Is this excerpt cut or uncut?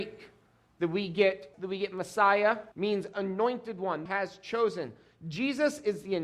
cut